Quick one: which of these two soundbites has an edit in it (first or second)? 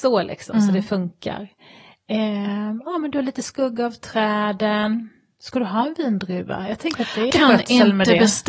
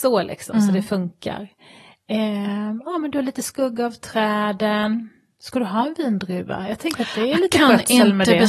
first